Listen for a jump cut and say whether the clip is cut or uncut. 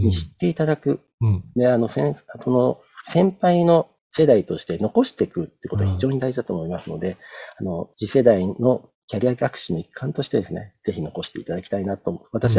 cut